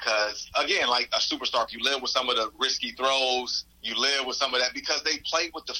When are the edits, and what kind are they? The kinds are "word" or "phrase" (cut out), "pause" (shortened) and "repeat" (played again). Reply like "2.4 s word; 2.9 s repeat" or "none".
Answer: 1.7 s word; 3.7 s pause